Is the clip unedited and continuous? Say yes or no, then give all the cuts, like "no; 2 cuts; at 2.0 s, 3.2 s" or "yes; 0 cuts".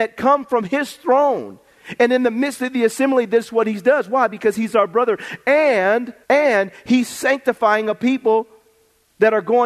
no; 1 cut; at 6.2 s